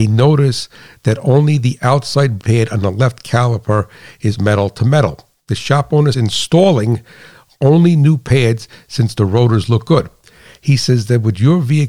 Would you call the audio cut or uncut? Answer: cut